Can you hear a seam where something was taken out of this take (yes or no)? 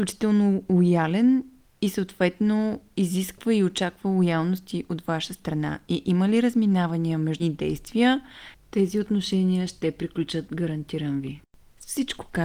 yes